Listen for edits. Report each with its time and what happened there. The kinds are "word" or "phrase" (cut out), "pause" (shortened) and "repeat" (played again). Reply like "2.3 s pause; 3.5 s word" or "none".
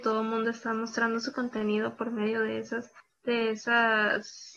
3.0 s pause